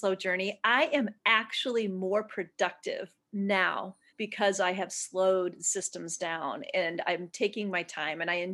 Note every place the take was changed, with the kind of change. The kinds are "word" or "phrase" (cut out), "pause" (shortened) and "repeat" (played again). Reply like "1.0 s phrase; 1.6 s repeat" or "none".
4.1 s pause

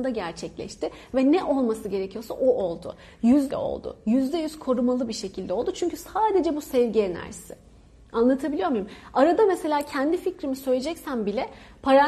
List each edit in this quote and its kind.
3.5 s phrase

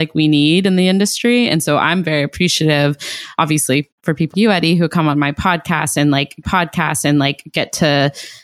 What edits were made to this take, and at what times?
4.0 s pause; 4.3 s word; 6.4 s repeat

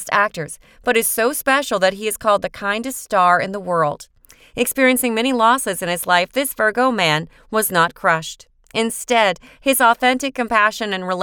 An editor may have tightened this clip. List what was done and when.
none

